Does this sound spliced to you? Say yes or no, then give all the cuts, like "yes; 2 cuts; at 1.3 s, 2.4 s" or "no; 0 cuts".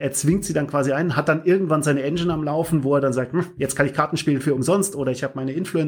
no; 0 cuts